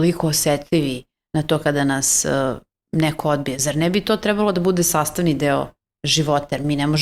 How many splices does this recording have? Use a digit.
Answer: 0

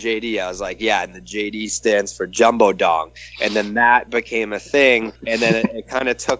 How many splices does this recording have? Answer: 1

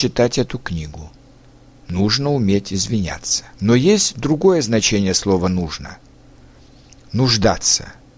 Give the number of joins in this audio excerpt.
1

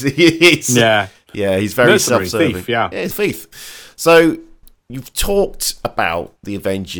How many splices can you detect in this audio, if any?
2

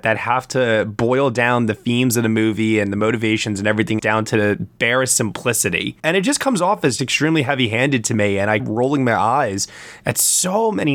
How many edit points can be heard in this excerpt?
4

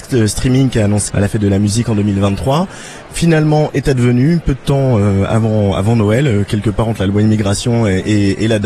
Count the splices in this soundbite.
2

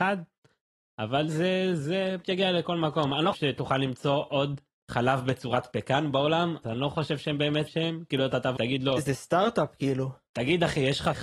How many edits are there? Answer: 7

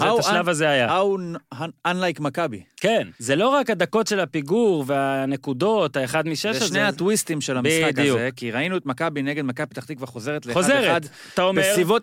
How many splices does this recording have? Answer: 1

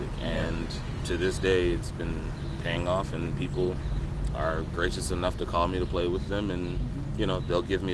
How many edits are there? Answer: 0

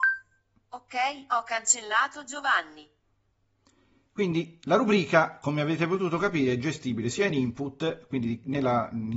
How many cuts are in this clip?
0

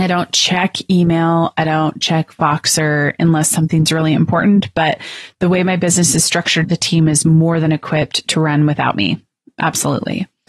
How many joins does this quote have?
1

